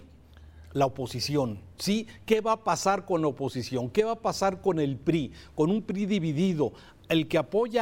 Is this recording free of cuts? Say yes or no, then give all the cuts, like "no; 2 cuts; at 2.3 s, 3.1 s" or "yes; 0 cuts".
yes; 0 cuts